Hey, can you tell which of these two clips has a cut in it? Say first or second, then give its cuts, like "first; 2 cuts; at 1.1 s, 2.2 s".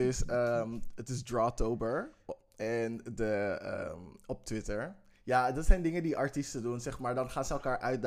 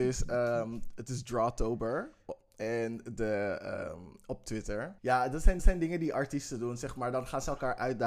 second; 2 cuts; at 5.0 s, 5.6 s